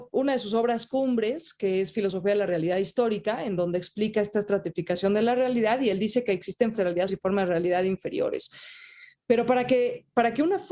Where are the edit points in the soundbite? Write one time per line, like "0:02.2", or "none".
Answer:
0:06.7
0:07.1